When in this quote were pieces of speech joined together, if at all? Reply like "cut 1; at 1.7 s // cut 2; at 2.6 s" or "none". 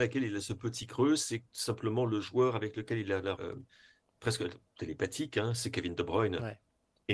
cut 1; at 3.4 s